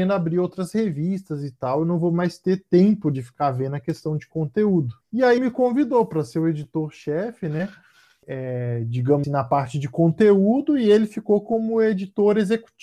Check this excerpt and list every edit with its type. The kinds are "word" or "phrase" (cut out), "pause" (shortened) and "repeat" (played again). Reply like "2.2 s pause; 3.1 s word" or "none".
5.4 s word; 9.2 s word

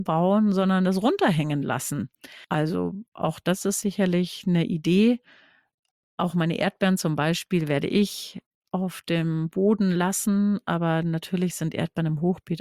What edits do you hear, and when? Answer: none

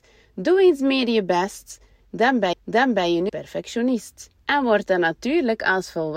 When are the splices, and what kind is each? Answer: 2.5 s repeat; 3.3 s phrase; 4.4 s pause

